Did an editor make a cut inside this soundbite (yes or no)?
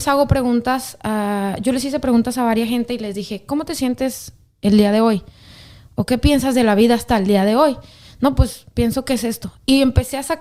no